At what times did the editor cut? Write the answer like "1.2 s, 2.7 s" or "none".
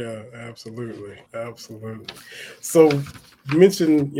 1.3 s